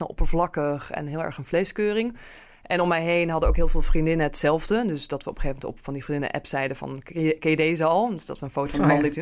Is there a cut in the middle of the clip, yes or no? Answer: no